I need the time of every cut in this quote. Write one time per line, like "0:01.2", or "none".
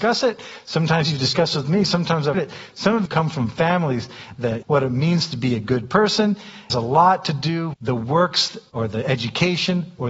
0:02.3
0:03.1
0:04.6
0:06.7
0:07.7